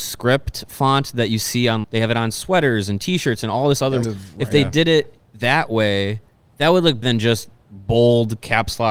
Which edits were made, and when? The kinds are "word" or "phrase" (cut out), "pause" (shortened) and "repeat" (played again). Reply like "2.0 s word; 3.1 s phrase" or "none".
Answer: 1.8 s word; 4.0 s word; 7.0 s word